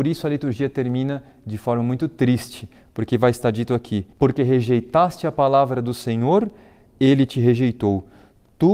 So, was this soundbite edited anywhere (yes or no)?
yes